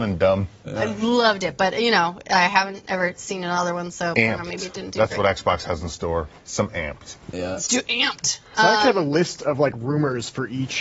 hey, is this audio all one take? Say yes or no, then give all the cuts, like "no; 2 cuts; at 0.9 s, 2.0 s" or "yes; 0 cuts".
yes; 0 cuts